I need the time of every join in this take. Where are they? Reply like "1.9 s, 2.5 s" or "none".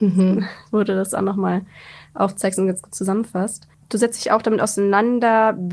none